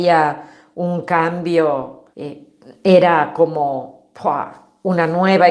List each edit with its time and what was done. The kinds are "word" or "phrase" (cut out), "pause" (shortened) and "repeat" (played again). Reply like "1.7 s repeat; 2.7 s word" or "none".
2.1 s pause